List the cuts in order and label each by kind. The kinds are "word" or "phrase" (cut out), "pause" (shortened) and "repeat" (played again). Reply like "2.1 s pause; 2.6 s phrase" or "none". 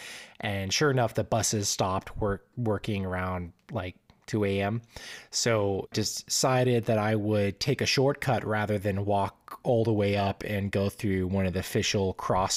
none